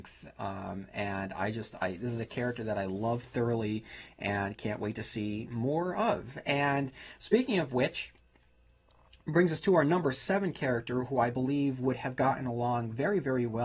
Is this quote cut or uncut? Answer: uncut